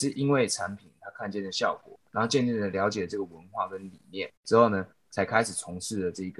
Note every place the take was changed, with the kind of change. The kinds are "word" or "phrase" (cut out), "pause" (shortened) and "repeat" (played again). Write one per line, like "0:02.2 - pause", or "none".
0:02.1 - pause
0:04.4 - pause

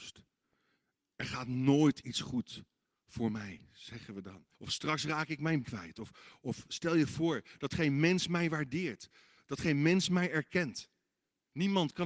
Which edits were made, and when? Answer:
0:04.5 - pause
0:05.6 - word

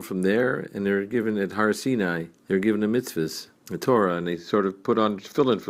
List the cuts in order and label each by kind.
0:02.4 - pause
0:03.6 - pause

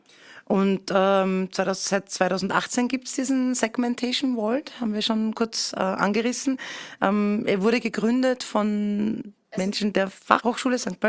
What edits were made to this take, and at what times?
none

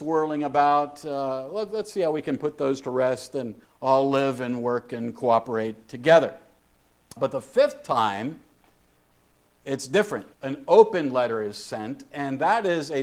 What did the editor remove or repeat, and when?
0:03.6 - pause
0:07.2 - word
0:10.3 - pause

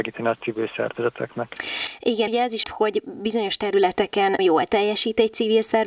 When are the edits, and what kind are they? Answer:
0:02.3 - word
0:02.6 - word
0:04.4 - word

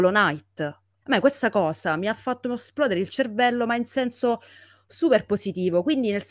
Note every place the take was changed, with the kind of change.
none

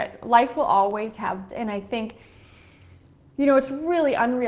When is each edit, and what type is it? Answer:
0:01.5 - word

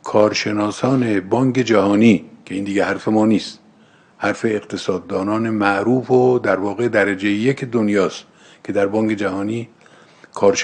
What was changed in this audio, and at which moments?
none

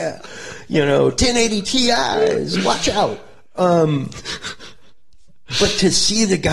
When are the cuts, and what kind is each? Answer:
none

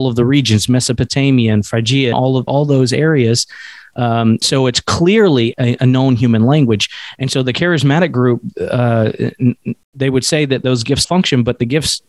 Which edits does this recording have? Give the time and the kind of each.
0:02.1 - word
0:02.5 - word
0:04.4 - word
0:05.5 - word
0:11.0 - word

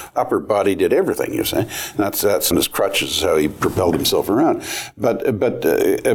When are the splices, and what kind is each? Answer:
0:02.5 - word

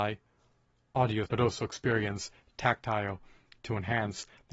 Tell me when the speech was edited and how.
0:01.3 - word
0:03.6 - word

